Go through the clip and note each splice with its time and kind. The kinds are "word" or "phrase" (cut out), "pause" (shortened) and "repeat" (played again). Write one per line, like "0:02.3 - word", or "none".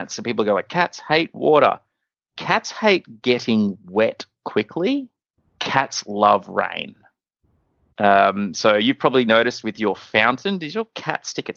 none